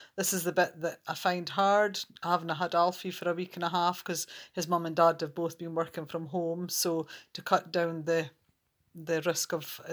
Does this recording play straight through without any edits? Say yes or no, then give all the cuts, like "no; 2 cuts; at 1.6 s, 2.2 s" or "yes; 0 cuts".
yes; 0 cuts